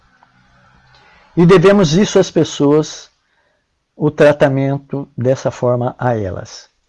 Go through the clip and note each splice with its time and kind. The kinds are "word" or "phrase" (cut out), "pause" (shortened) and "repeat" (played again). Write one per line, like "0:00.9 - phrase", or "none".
none